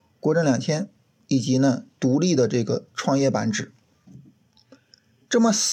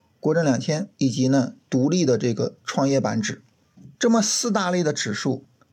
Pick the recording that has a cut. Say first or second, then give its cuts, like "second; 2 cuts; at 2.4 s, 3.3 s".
second; 2 cuts; at 0.9 s, 3.9 s